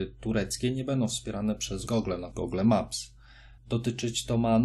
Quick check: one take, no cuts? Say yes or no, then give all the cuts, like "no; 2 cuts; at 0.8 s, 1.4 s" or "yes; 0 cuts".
no; 3 cuts; at 1.9 s, 2.3 s, 3.6 s